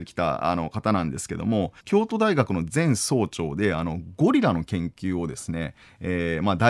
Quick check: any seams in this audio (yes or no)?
yes